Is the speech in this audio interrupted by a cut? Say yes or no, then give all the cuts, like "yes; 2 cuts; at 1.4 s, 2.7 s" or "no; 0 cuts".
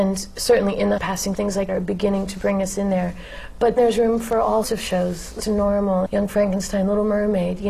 yes; 7 cuts; at 1.0 s, 1.3 s, 1.7 s, 3.8 s, 4.6 s, 5.4 s, 6.1 s